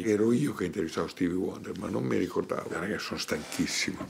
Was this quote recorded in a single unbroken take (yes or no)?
yes